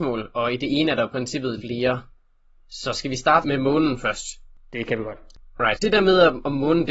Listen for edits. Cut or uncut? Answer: cut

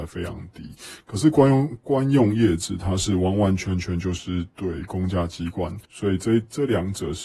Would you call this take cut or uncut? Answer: cut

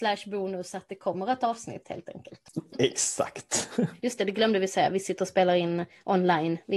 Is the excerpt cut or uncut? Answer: cut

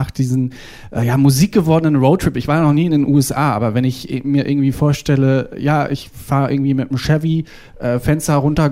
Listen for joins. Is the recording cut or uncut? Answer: uncut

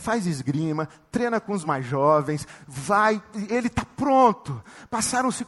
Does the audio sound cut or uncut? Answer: uncut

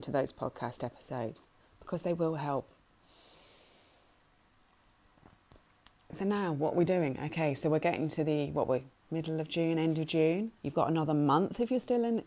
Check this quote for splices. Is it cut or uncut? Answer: cut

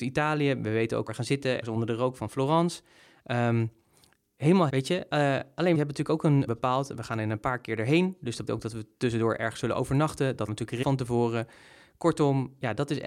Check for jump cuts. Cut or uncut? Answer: cut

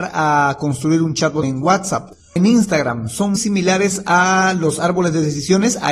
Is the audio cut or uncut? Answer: cut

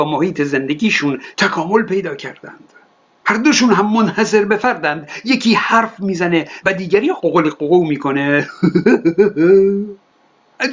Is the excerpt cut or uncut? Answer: uncut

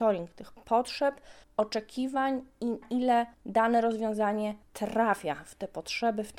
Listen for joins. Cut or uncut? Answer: cut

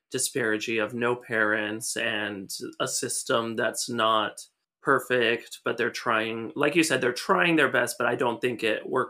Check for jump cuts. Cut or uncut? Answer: cut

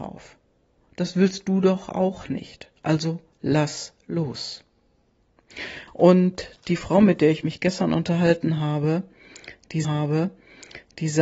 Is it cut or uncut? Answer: cut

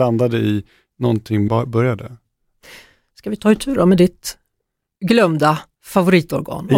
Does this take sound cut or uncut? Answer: cut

